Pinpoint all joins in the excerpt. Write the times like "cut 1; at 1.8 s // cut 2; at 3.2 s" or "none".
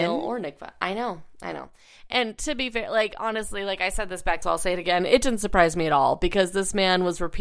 cut 1; at 4.4 s